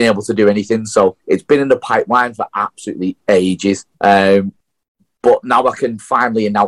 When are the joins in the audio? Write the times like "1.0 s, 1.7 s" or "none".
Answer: 1.2 s, 3.9 s